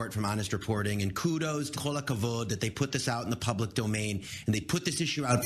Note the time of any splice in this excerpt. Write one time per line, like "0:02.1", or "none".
0:01.7